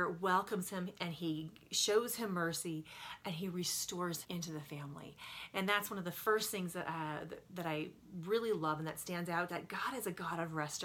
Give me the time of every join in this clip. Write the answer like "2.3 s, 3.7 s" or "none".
4.2 s, 9.5 s